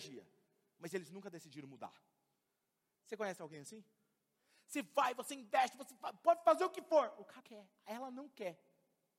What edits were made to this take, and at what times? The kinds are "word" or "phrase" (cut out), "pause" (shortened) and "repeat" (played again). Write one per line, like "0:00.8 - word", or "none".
0:07.4 - word